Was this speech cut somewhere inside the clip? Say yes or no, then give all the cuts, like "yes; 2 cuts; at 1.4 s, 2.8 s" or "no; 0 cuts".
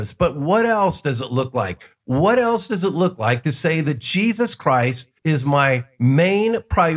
yes; 1 cut; at 5.2 s